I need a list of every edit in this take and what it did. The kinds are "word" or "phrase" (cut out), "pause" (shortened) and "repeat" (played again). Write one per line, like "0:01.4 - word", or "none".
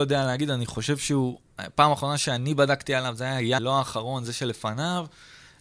0:03.6 - word